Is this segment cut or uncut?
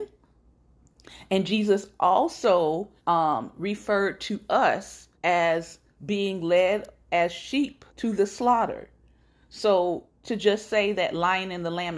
cut